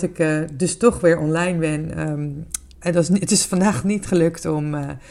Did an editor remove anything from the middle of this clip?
yes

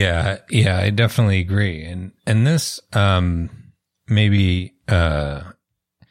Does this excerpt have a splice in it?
no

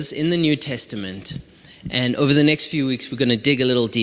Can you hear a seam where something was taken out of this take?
no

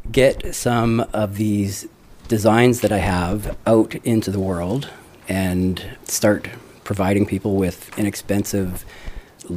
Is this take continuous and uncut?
no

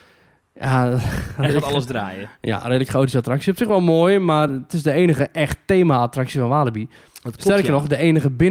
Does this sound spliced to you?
no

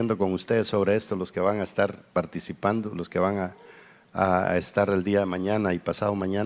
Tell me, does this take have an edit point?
no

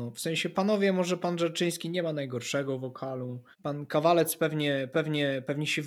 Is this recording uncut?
no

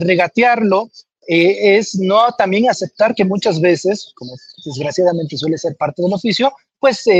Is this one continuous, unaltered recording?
yes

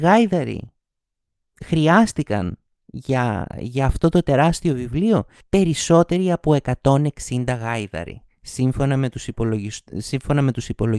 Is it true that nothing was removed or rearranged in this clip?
no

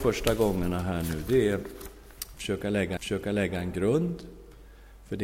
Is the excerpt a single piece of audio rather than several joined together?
no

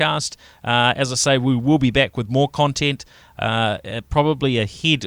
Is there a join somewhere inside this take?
no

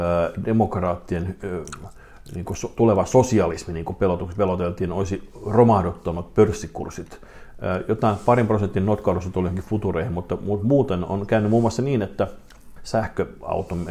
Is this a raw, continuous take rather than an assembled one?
no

